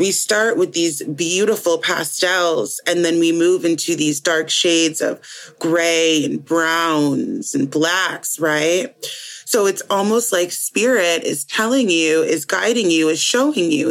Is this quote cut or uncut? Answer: uncut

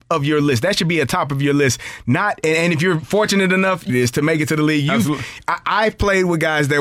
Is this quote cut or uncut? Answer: cut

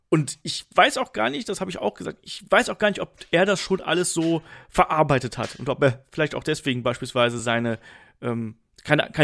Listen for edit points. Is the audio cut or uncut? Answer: uncut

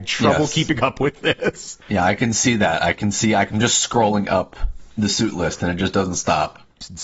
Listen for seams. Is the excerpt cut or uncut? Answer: uncut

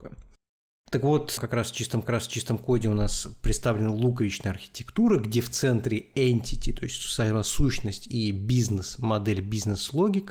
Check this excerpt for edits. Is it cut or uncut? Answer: cut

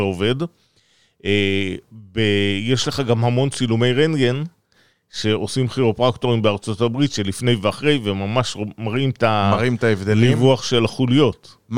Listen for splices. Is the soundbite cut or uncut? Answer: uncut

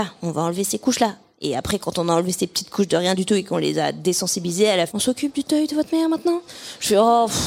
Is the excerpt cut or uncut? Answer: cut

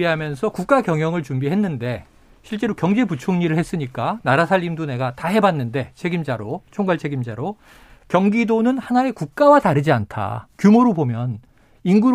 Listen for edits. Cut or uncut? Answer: uncut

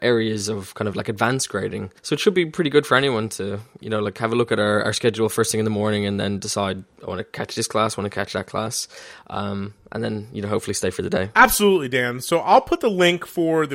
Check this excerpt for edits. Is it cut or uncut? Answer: cut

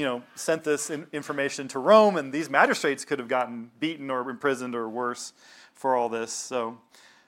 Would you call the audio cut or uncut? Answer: uncut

